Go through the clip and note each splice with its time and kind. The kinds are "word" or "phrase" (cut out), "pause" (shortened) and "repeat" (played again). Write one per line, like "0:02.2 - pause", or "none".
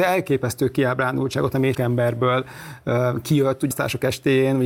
0:01.7 - word
0:03.7 - word